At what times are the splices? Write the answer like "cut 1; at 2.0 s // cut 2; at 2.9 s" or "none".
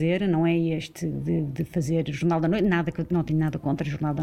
none